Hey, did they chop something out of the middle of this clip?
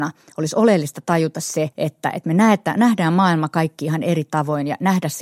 yes; 1 cut; at 1.7 s

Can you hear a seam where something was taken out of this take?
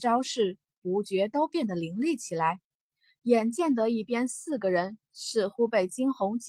no; 0 cuts

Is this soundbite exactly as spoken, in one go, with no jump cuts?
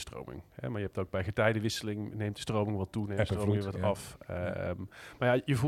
yes; 0 cuts

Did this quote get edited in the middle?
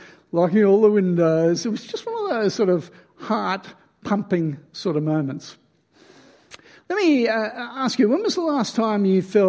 no; 0 cuts

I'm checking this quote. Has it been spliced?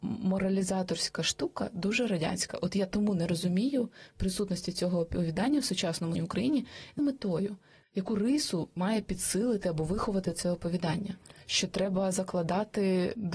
yes; 2 cuts; at 6.1 s, 7.0 s

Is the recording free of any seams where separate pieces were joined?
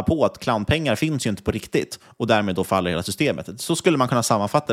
yes; 0 cuts

